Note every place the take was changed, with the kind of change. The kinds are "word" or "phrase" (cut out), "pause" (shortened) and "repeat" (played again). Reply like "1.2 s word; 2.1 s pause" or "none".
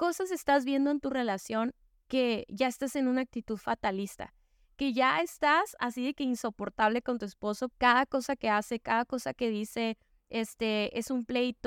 7.7 s word